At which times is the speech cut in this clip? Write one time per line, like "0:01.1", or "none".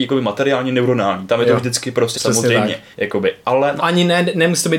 0:02.1
0:02.9
0:03.8